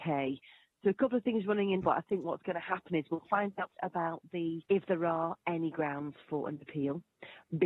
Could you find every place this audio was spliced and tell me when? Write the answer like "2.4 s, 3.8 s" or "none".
1.8 s, 3.8 s, 4.7 s